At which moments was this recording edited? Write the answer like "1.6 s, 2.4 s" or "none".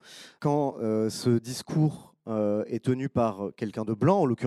none